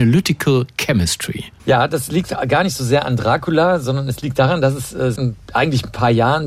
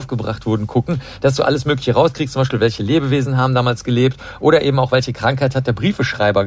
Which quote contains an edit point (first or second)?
first